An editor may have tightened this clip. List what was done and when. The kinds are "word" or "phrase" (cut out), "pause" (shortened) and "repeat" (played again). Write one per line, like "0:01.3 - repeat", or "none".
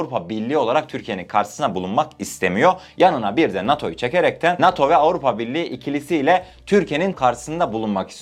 0:07.1 - word